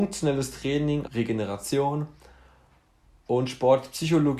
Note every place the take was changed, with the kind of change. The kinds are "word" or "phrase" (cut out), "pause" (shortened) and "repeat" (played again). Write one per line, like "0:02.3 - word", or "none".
0:01.1 - word